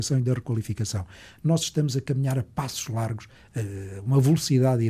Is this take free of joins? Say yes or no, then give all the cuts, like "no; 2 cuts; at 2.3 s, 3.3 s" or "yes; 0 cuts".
yes; 0 cuts